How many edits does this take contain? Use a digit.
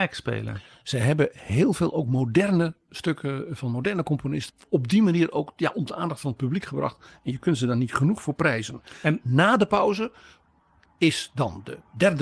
0